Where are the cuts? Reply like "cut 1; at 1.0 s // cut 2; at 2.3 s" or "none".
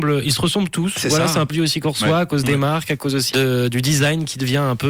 cut 1; at 1.5 s // cut 2; at 3.3 s